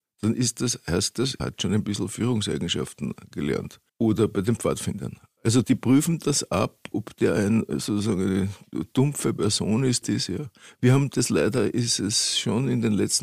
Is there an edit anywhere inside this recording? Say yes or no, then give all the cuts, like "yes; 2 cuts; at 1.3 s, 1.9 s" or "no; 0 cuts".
yes; 5 cuts; at 1.4 s, 3.9 s, 5.6 s, 6.9 s, 10.0 s